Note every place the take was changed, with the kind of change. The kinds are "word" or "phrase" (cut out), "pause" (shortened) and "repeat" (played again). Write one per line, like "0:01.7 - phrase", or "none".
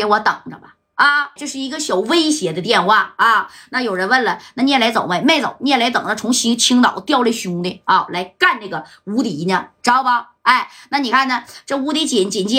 0:01.4 - word